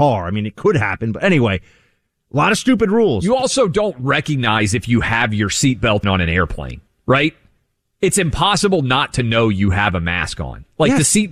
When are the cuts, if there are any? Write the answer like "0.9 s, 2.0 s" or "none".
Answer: 6.0 s